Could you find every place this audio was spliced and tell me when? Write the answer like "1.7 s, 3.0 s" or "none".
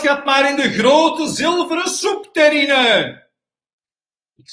none